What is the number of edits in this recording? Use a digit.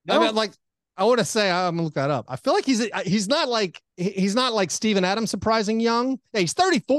1